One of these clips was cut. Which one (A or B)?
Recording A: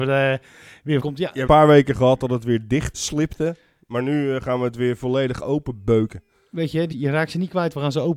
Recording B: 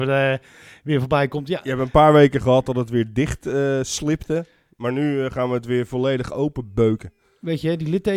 A